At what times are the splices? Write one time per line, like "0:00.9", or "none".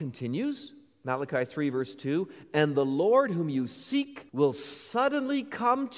0:04.3